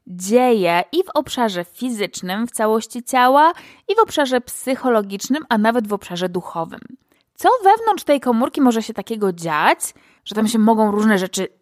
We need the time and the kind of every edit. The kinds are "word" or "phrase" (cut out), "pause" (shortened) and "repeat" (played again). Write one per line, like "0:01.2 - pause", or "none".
none